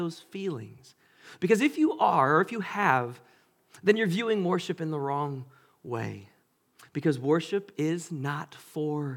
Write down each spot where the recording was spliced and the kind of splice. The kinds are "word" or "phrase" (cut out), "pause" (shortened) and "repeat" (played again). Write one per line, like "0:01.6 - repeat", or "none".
none